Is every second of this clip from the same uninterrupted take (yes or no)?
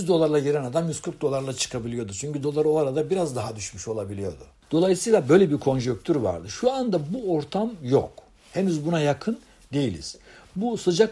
yes